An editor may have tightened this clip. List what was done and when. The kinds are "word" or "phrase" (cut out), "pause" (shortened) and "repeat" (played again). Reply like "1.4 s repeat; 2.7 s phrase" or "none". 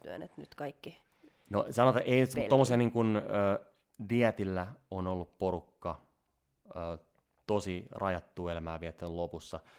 none